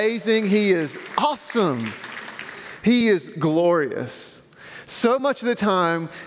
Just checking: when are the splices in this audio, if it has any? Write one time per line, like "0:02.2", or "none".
none